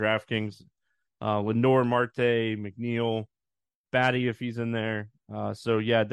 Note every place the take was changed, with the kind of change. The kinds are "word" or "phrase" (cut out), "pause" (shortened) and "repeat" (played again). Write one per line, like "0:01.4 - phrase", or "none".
none